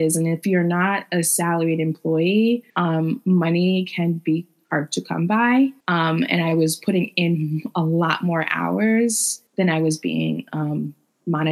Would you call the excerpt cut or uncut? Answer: cut